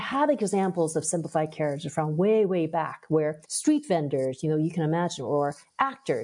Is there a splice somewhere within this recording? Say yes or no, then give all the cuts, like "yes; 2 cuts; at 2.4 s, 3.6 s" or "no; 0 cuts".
yes; 1 cut; at 3.4 s